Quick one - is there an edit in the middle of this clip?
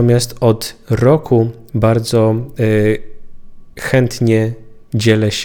yes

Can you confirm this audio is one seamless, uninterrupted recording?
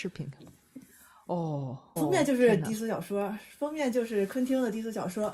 no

